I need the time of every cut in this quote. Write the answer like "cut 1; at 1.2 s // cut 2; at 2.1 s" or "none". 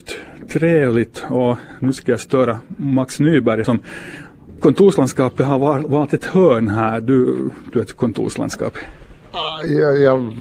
cut 1; at 3.6 s // cut 2; at 4.6 s // cut 3; at 7.7 s